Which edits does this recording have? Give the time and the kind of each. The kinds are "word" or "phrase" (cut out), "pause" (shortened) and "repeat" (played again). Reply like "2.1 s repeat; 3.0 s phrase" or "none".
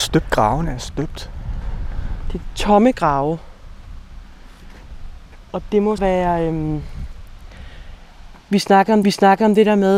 6.0 s word; 9.0 s repeat